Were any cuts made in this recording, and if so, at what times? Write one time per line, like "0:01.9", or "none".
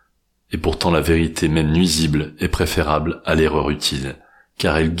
none